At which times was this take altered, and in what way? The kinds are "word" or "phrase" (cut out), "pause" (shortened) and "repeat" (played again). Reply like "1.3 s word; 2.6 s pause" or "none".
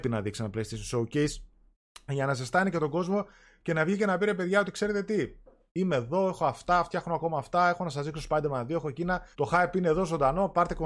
9.3 s pause